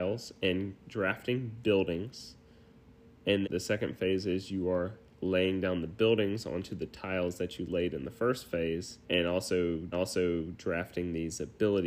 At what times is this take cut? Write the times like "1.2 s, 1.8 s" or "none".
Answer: 3.4 s, 9.0 s, 9.9 s